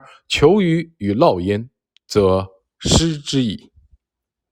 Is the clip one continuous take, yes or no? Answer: yes